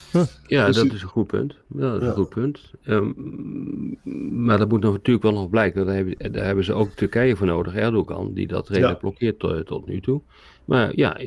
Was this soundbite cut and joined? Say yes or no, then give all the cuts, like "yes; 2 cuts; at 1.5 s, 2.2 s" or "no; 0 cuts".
no; 0 cuts